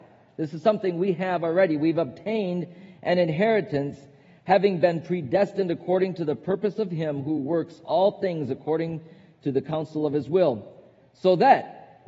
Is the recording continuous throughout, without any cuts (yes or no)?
yes